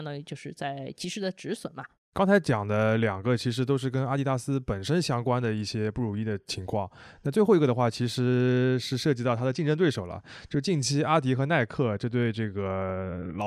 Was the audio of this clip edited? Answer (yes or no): no